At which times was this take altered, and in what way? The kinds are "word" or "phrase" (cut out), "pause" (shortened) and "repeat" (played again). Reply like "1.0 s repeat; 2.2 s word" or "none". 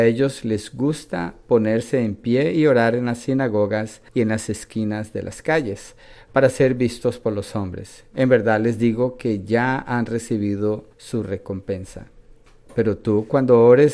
4.1 s pause; 10.9 s pause